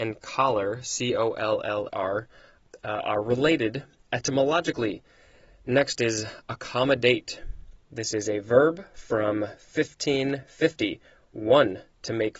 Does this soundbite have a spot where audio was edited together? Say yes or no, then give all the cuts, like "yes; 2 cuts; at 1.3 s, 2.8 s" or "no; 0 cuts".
yes; 3 cuts; at 1.9 s, 4.0 s, 7.8 s